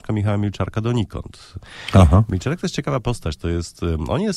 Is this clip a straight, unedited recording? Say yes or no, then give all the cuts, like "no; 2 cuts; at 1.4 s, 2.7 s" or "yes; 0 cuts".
yes; 0 cuts